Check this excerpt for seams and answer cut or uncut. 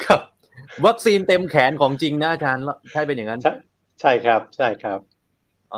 uncut